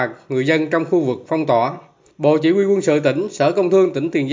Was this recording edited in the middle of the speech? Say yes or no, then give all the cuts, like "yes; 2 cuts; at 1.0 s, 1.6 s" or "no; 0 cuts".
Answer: no; 0 cuts